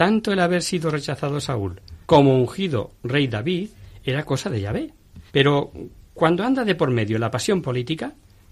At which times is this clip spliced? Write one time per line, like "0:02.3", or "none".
0:02.0
0:05.3